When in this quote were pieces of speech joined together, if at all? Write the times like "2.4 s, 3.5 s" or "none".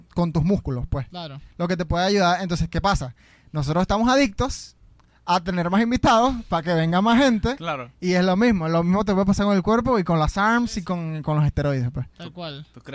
1.5 s